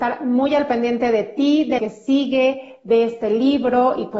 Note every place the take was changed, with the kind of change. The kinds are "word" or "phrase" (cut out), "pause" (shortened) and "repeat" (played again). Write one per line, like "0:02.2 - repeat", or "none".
0:01.8 - word